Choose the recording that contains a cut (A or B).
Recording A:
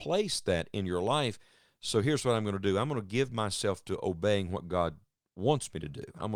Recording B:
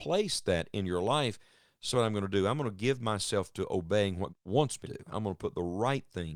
B